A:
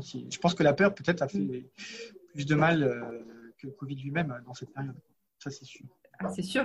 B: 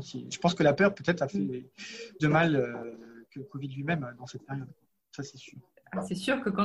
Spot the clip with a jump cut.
B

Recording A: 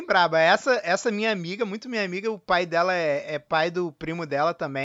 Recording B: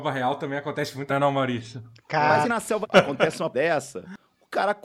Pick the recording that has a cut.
B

